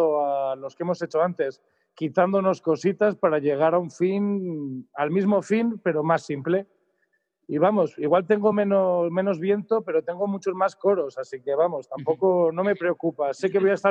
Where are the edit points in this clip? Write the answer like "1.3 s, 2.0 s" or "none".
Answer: none